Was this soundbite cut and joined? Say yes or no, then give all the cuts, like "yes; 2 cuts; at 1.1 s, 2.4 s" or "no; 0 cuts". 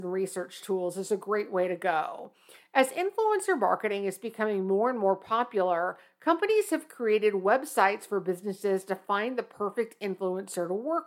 no; 0 cuts